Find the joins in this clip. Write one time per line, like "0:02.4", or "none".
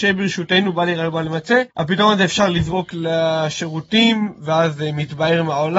0:01.7